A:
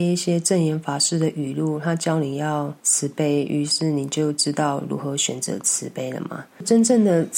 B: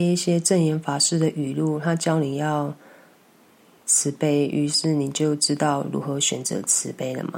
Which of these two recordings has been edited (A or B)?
A